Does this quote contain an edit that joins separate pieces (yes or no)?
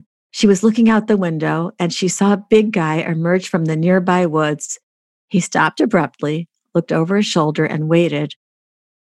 no